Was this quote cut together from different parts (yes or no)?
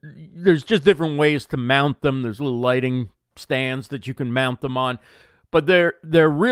no